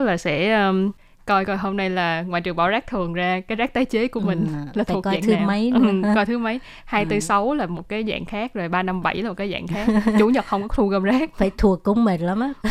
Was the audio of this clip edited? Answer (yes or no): no